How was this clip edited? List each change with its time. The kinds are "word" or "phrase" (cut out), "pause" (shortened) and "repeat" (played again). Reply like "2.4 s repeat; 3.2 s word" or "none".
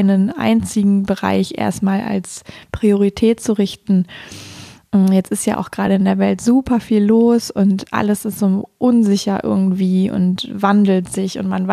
none